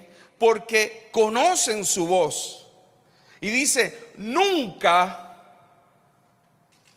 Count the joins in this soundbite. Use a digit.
0